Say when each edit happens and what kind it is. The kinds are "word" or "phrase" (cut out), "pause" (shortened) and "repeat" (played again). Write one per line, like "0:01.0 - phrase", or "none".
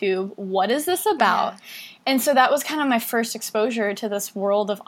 none